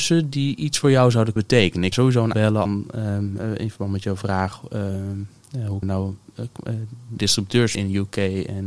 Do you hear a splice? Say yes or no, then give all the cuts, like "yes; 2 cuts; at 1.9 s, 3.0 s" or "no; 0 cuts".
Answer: yes; 7 cuts; at 1.4 s, 1.9 s, 2.3 s, 2.6 s, 5.8 s, 7.2 s, 7.7 s